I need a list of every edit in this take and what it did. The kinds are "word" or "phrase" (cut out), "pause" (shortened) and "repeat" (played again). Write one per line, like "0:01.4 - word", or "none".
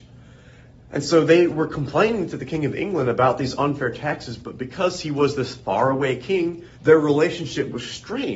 0:06.7 - pause

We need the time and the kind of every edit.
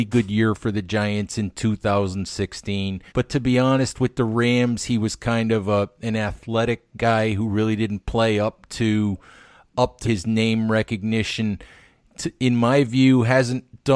0:03.1 - pause
0:10.0 - word

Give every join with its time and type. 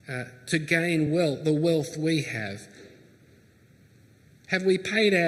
none

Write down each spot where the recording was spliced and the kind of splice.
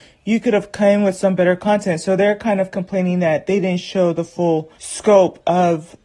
0:04.8 - pause

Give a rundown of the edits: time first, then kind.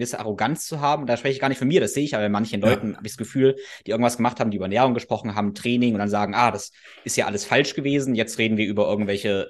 none

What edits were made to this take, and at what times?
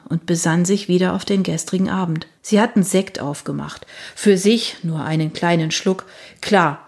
0:02.4 - pause

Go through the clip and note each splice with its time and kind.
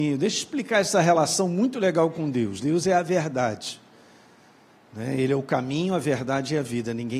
none

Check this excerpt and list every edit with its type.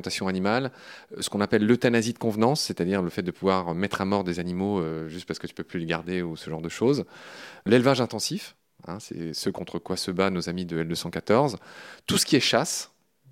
none

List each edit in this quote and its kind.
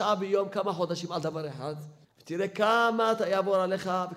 0:02.0 - pause

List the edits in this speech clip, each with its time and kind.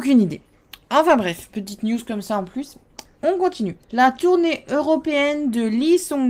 0:03.8 - pause

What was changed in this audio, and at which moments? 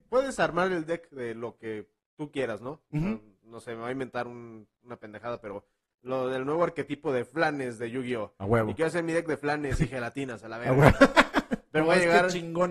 none

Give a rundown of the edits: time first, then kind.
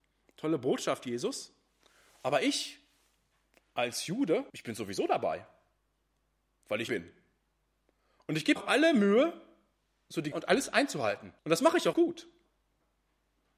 0:04.5 - pause
0:06.9 - word
0:08.6 - word
0:10.3 - word
0:11.4 - pause
0:11.9 - word

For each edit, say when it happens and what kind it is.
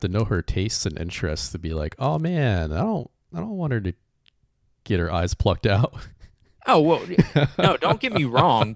none

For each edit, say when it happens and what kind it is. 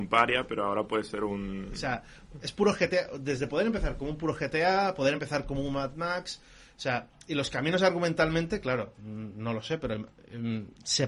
none

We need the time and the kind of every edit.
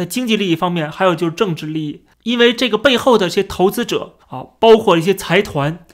0:04.2 - pause

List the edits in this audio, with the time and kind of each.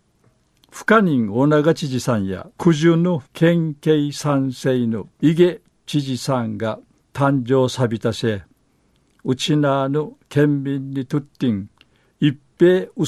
0:02.5 - pause
0:03.3 - pause
0:05.1 - pause
0:06.9 - pause

